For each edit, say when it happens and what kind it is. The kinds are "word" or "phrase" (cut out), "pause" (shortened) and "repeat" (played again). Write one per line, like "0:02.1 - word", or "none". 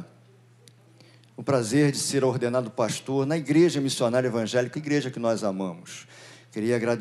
0:04.7 - word